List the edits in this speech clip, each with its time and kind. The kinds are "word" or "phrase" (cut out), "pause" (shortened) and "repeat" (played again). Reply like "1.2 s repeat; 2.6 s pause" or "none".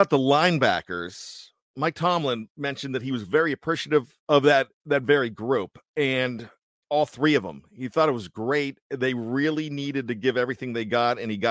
4.2 s pause; 5.9 s pause; 8.8 s pause